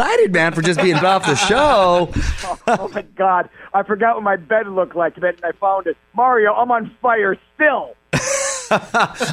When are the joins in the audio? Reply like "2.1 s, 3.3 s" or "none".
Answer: 1.0 s, 2.6 s, 5.2 s, 5.5 s